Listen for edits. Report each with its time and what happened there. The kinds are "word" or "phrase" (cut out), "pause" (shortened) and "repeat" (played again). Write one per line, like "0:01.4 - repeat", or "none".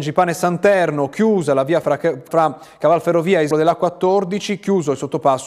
0:01.8 - word
0:02.3 - word
0:03.5 - word